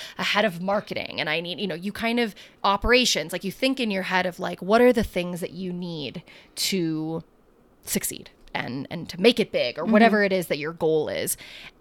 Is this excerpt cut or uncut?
uncut